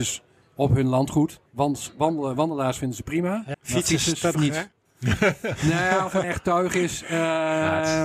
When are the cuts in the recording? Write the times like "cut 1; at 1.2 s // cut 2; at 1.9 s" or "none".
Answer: cut 1; at 3.5 s // cut 2; at 4.3 s // cut 3; at 6.2 s